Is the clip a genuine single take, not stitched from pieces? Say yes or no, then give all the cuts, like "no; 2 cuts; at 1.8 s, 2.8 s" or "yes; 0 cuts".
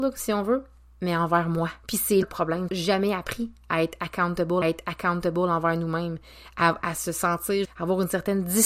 no; 6 cuts; at 1.8 s, 2.2 s, 2.7 s, 4.6 s, 6.8 s, 7.6 s